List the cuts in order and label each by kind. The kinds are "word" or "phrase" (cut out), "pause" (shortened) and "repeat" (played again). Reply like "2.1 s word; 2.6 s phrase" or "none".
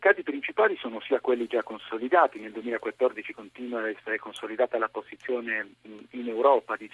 none